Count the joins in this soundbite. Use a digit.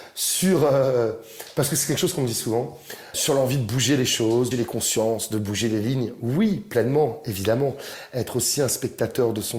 2